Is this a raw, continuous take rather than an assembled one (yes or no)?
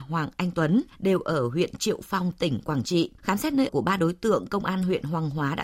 no